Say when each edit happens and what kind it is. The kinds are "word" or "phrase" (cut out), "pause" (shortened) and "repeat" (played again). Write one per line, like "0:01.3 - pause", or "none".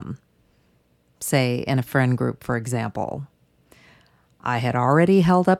none